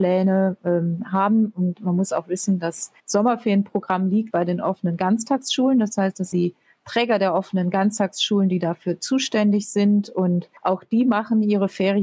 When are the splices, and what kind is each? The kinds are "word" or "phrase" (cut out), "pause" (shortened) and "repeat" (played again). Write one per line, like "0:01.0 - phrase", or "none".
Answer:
0:03.0 - pause
0:04.3 - word
0:06.3 - phrase
0:10.6 - pause